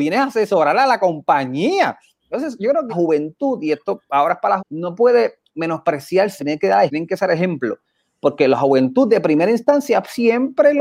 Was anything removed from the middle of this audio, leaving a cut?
yes; 4 cuts; at 2.9 s, 4.6 s, 6.4 s, 6.9 s

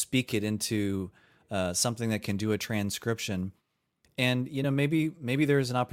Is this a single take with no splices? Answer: yes; 0 cuts

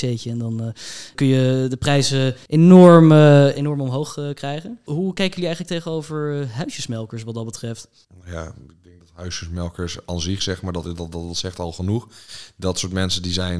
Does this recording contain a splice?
no; 0 cuts

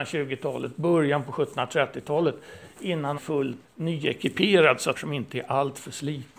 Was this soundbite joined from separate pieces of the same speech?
yes; 3 cuts; at 3.1 s, 3.6 s, 4.9 s

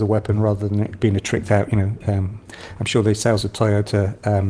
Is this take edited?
no; 0 cuts

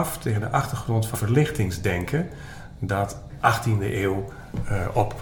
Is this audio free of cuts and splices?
no; 2 cuts; at 1.1 s, 3.3 s

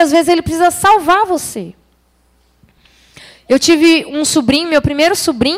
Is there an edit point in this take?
no; 0 cuts

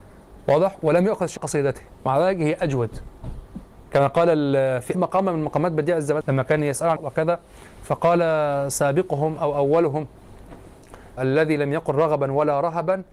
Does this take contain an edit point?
yes; 6 cuts; at 1.4 s, 1.9 s, 4.9 s, 6.2 s, 7.0 s, 11.2 s

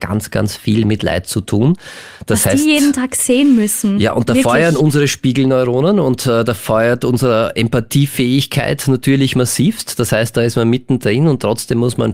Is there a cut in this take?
no; 0 cuts

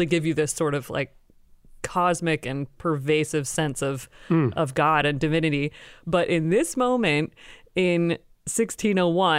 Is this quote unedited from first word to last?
yes; 0 cuts

